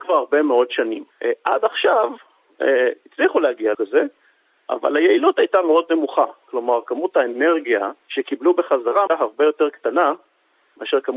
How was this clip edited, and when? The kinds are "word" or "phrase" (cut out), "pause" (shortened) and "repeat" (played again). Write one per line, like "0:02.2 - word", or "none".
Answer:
0:01.1 - pause
0:03.7 - word
0:08.0 - pause
0:09.1 - phrase